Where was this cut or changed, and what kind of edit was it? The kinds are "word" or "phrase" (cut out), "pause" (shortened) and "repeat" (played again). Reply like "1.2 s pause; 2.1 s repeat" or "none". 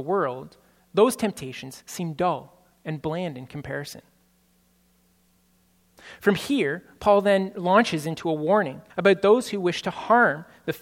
8.9 s pause